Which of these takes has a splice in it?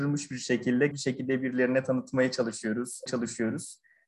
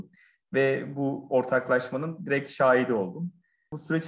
first; 2 cuts; at 0.9 s, 3.1 s

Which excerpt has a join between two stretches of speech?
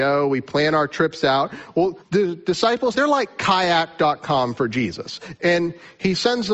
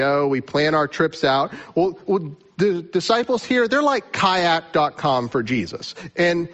first; 2 cuts; at 2.0 s, 2.9 s

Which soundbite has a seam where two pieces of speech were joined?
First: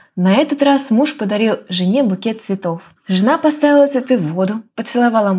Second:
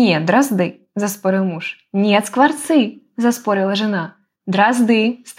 first; 1 cut; at 3.0 s

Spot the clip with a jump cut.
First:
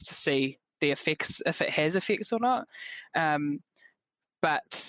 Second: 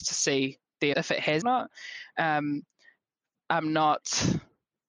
second; 3 cuts; at 0.9 s, 1.4 s, 3.3 s

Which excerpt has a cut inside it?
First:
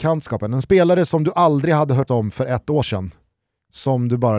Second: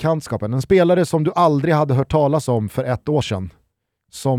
first; 1 cut; at 2.1 s

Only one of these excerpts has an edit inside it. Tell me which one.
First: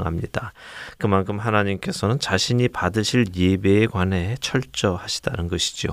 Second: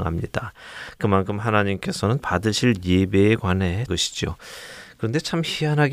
second; 2 cuts; at 2.2 s, 3.9 s

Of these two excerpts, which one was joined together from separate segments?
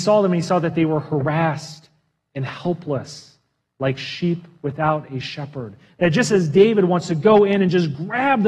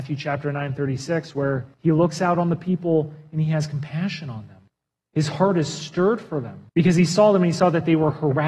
second; 3 cuts; at 1.7 s, 4.7 s, 6.7 s

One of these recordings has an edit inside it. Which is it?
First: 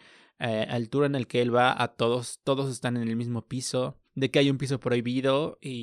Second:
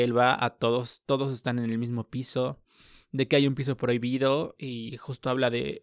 first; 1 cut; at 4.1 s

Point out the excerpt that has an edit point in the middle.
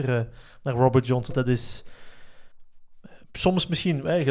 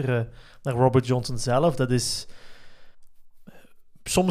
first; 2 cuts; at 1.3 s, 3.2 s

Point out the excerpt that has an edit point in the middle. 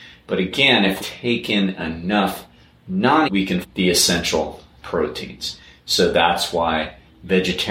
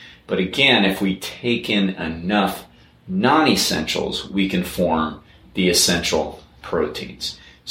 first; 3 cuts; at 1.0 s, 3.2 s, 3.6 s

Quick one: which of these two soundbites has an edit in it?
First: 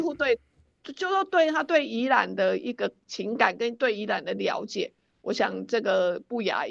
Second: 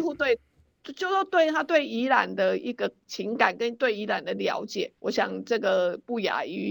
second; 1 cut; at 5.0 s

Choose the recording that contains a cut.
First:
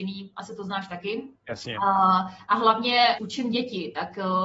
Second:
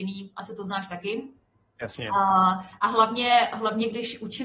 first; 2 cuts; at 1.3 s, 3.2 s

